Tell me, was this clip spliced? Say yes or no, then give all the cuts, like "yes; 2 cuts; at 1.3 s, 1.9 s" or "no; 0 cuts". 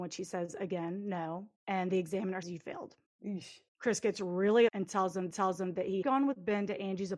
yes; 6 cuts; at 1.6 s, 2.4 s, 3.7 s, 4.7 s, 5.3 s, 6.0 s